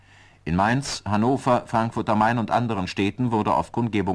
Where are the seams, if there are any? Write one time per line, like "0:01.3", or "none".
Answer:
none